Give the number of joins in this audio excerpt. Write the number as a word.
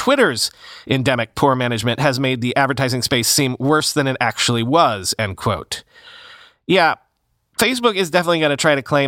zero